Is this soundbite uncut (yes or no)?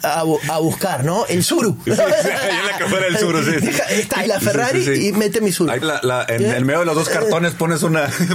no